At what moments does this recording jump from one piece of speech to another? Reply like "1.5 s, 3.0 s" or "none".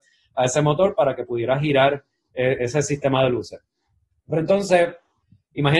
none